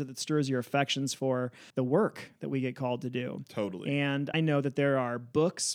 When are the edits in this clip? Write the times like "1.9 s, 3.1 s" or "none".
1.7 s, 4.3 s